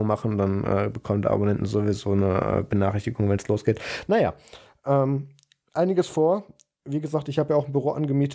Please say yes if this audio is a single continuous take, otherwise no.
yes